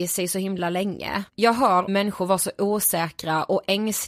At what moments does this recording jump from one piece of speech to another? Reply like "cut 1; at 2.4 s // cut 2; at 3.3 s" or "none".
cut 1; at 1.3 s // cut 2; at 1.9 s